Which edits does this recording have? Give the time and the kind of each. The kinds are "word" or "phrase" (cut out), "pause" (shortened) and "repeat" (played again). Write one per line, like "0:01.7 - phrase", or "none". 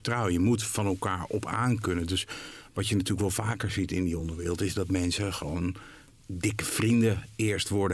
none